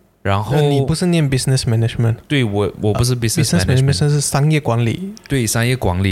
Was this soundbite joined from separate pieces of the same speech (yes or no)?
no